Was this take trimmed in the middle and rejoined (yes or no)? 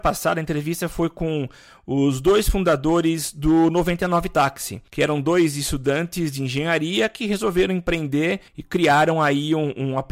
yes